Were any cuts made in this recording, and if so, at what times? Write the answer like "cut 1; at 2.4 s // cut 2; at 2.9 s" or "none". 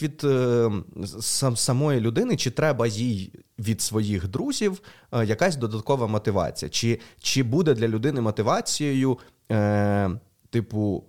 none